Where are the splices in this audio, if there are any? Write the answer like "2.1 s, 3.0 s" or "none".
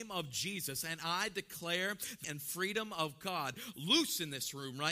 2.2 s